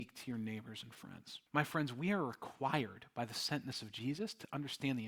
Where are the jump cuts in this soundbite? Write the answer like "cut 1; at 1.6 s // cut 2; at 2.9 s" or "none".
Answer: cut 1; at 1.5 s